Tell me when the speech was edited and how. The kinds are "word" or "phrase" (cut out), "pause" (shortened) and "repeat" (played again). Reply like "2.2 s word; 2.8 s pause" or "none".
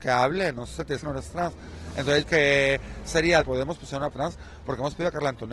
1.0 s phrase; 2.2 s phrase; 3.4 s phrase; 4.1 s word